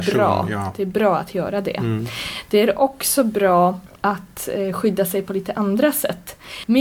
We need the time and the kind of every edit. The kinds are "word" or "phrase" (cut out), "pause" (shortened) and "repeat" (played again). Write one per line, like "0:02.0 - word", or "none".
0:04.0 - pause